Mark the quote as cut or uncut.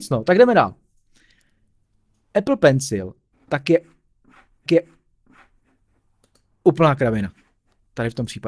cut